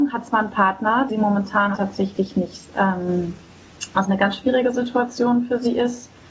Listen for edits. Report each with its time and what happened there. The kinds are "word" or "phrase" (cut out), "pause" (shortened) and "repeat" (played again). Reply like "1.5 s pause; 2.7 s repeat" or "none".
1.1 s word; 1.7 s word; 2.7 s word; 4.0 s word